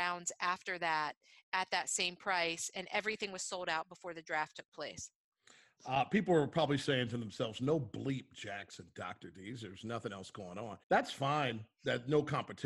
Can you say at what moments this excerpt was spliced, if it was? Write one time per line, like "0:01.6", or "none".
0:10.8

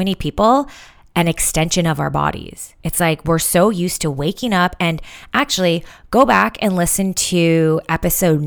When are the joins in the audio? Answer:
0:02.8

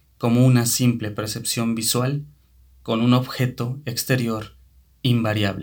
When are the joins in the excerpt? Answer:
none

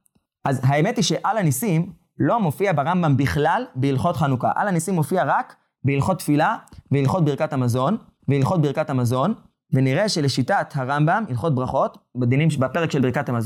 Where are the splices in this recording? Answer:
0:08.2

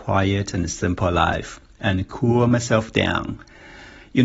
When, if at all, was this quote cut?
none

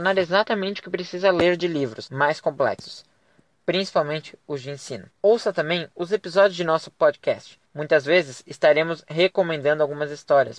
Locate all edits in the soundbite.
0:05.1
0:07.6

